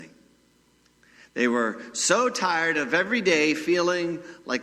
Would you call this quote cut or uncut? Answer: uncut